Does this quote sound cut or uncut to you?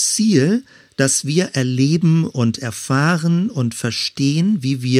uncut